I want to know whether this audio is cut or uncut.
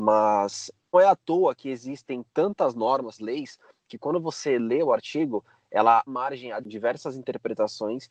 cut